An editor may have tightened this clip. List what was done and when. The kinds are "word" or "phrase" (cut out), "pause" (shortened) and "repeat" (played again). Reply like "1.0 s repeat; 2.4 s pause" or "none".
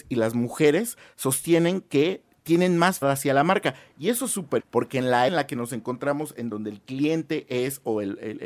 3.0 s word; 4.6 s word; 5.3 s word